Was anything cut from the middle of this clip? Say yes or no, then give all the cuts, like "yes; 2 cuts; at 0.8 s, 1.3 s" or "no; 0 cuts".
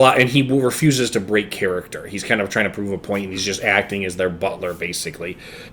no; 0 cuts